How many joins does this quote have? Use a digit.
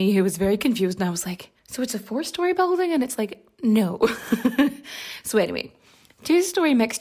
1